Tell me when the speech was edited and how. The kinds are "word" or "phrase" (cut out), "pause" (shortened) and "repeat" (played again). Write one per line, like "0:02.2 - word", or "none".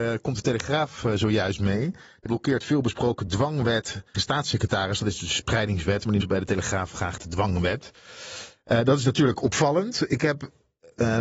0:02.3 - word
0:04.1 - phrase
0:06.2 - word